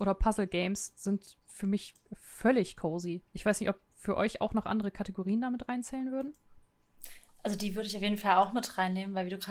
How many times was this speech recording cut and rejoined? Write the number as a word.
one